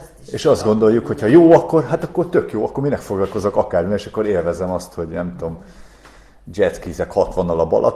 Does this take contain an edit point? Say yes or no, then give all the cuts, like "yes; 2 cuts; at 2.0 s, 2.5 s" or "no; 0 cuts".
no; 0 cuts